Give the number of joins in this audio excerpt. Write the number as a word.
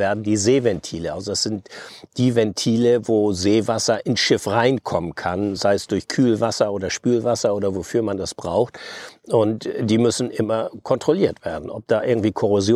zero